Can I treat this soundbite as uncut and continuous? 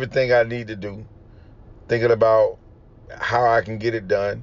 yes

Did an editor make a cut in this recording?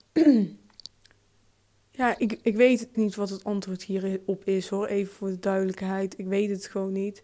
yes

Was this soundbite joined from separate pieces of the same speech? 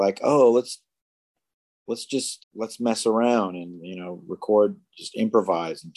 yes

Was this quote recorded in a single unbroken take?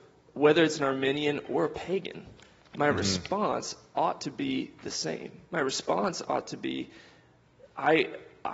yes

